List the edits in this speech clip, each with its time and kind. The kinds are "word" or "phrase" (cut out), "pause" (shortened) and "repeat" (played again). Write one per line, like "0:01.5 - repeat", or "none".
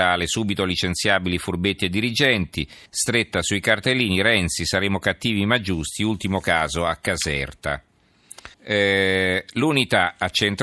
0:02.9 - pause
0:08.5 - pause